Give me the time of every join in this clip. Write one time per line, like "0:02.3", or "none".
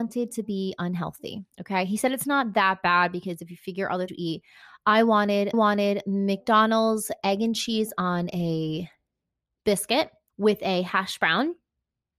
0:01.5
0:04.1
0:05.5
0:10.3